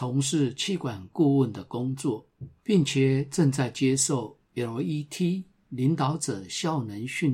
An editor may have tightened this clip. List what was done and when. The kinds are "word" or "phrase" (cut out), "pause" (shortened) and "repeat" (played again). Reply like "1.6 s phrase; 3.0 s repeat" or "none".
2.6 s pause